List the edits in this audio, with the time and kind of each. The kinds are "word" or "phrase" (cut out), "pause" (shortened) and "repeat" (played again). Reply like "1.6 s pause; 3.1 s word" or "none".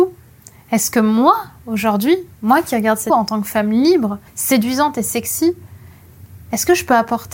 3.1 s word; 4.3 s pause